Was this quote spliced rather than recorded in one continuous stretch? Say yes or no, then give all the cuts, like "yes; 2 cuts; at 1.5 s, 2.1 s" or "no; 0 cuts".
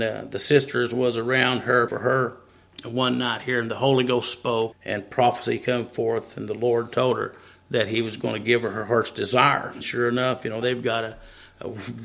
yes; 4 cuts; at 1.9 s, 4.7 s, 9.8 s, 10.6 s